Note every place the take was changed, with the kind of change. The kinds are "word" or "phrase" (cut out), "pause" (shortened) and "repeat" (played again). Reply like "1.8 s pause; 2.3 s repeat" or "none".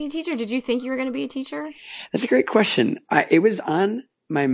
none

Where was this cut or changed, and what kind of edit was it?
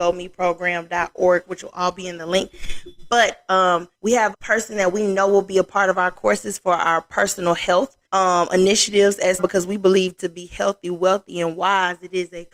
3.9 s pause; 4.3 s word; 8.1 s pause; 9.4 s word

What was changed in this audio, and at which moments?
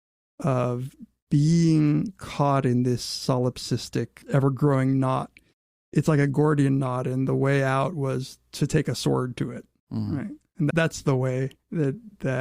4.2 s pause; 10.7 s word

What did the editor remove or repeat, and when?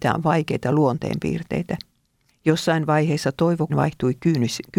2.3 s pause; 3.7 s word

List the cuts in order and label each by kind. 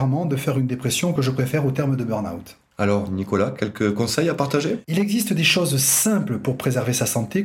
none

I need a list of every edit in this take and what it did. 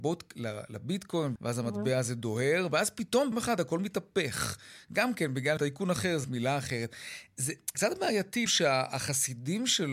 1.4 s word; 3.3 s word; 5.6 s word; 6.2 s word; 7.7 s word; 8.5 s word

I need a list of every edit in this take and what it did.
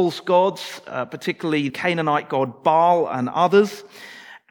1.7 s word

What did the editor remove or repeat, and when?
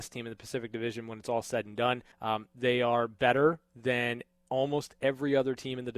2.1 s pause

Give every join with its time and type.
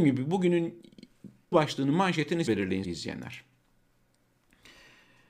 1.5 s word; 2.5 s word; 2.8 s word

